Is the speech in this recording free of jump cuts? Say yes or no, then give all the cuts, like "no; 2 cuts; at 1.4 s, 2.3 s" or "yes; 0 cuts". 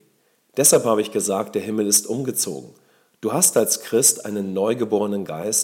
yes; 0 cuts